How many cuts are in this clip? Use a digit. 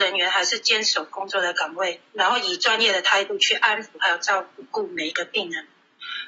1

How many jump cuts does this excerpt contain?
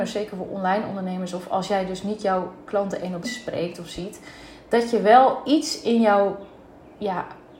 2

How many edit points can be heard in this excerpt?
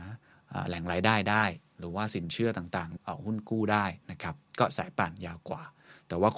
2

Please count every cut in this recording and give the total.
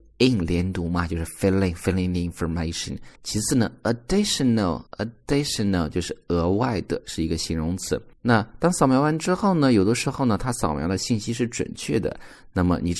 2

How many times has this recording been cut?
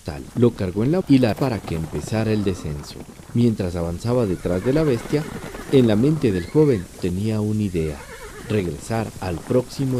3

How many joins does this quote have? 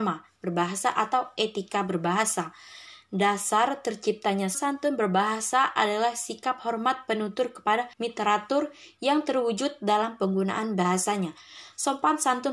2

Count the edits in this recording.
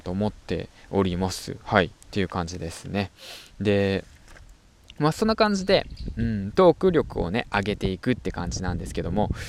1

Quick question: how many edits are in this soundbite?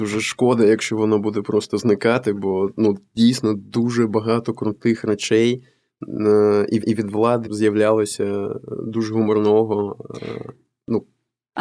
2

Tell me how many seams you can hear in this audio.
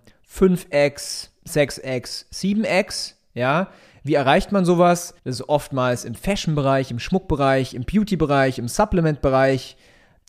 1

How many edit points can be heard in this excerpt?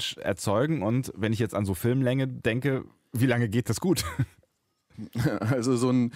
0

